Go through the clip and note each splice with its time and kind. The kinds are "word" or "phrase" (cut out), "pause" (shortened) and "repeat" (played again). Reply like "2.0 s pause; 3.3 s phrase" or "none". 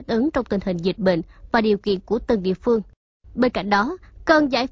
none

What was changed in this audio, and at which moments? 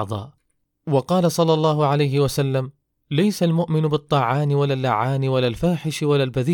none

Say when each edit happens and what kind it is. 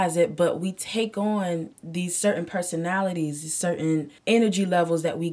1.7 s pause; 4.2 s pause

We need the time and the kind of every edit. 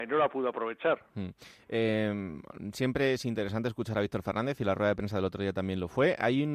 none

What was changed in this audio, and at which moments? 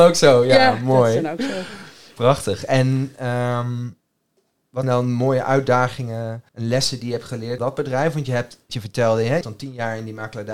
4.8 s word; 6.5 s pause; 7.6 s phrase; 8.7 s word; 9.4 s word

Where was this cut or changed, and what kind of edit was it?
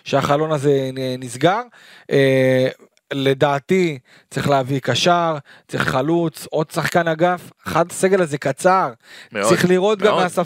5.8 s word; 7.9 s word

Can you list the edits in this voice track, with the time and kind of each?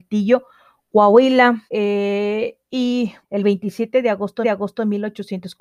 1.7 s pause; 3.2 s word; 4.4 s repeat

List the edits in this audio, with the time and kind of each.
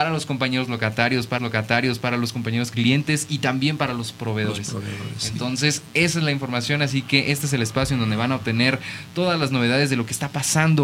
1.4 s repeat; 2.7 s phrase

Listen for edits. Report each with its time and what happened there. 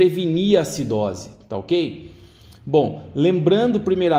none

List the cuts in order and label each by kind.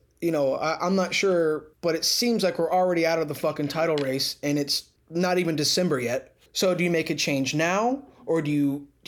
1.7 s pause; 5.0 s pause; 6.5 s pause

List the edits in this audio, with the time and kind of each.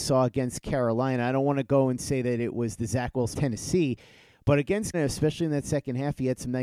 3.3 s phrase; 4.9 s word

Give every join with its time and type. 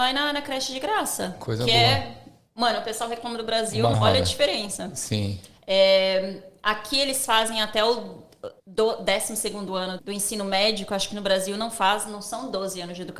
3.9 s word; 8.6 s pause; 10.0 s word

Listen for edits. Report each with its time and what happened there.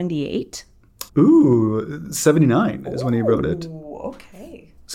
1.1 s pause

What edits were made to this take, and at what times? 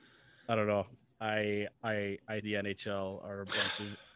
1.7 s word; 2.4 s word

